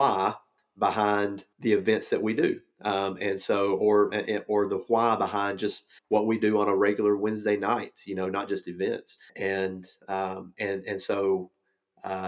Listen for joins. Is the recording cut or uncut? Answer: cut